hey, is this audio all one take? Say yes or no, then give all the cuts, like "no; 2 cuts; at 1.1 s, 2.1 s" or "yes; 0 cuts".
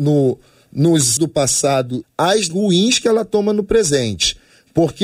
no; 3 cuts; at 1.2 s, 2.0 s, 2.5 s